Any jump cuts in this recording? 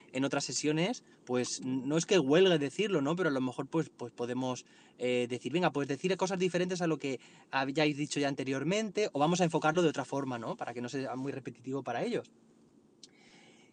no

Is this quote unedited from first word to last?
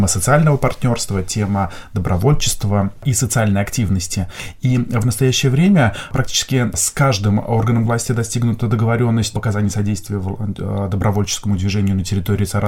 no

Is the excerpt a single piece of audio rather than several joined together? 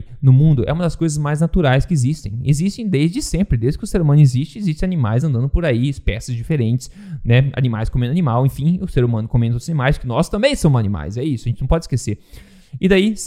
yes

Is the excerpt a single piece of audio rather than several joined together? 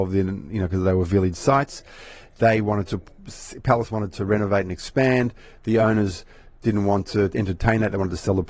yes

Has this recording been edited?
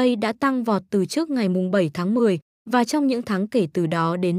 no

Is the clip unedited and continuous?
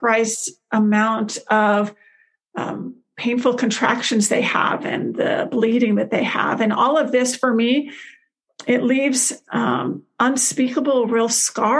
yes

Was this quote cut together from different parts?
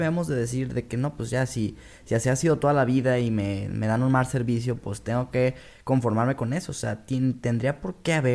no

